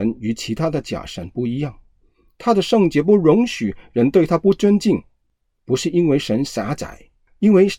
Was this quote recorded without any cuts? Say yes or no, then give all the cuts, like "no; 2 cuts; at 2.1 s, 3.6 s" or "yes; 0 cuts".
yes; 0 cuts